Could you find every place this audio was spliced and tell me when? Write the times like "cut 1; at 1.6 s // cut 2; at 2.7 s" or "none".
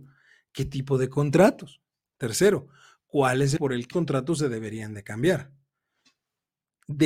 cut 1; at 3.6 s // cut 2; at 3.9 s